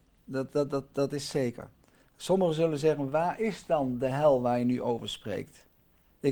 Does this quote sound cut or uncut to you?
uncut